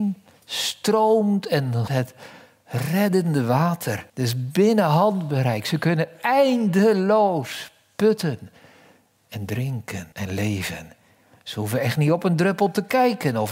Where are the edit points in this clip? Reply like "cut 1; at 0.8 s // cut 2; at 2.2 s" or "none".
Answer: cut 1; at 1.9 s // cut 2; at 4.1 s // cut 3; at 10.1 s

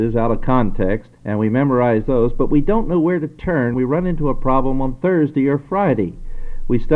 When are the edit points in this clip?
cut 1; at 1.2 s // cut 2; at 3.7 s

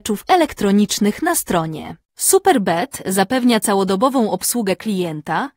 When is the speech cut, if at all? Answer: cut 1; at 2.0 s

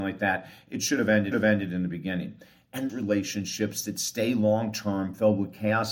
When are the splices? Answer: cut 1; at 1.3 s // cut 2; at 2.9 s

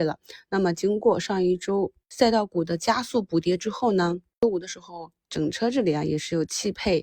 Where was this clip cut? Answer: none

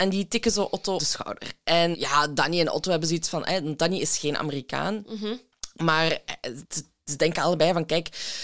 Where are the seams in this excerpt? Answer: cut 1; at 1.0 s // cut 2; at 1.9 s // cut 3; at 6.6 s

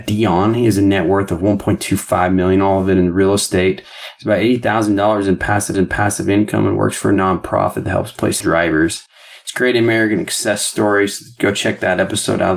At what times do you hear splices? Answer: cut 1; at 5.7 s // cut 2; at 8.4 s

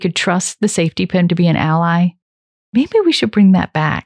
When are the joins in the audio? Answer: cut 1; at 1.3 s

